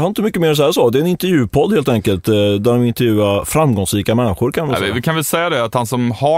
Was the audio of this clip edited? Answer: no; 0 cuts

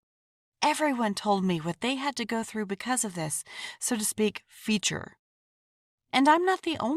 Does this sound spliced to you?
no; 0 cuts

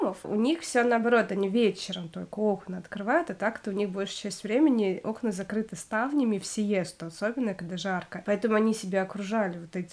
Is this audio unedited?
yes; 0 cuts

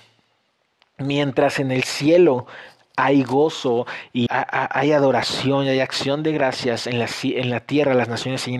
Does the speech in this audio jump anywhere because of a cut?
yes; 1 cut; at 4.3 s

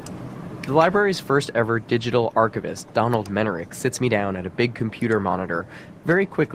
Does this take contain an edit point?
no; 0 cuts

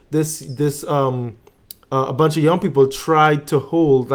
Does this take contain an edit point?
no; 0 cuts

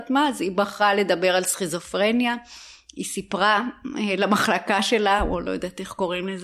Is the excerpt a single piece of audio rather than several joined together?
yes; 0 cuts

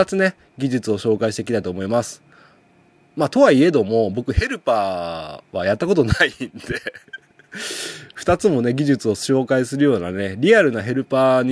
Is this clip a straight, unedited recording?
yes; 0 cuts

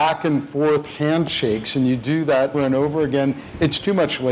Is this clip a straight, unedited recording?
no; 1 cut; at 2.5 s

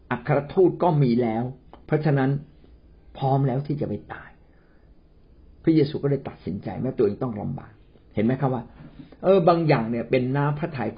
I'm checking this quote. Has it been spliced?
no; 0 cuts

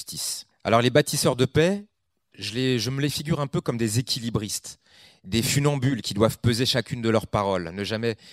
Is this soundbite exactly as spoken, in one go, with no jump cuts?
yes; 0 cuts

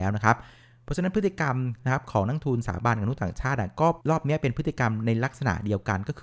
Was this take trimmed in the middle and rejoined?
yes; 1 cut; at 4.0 s

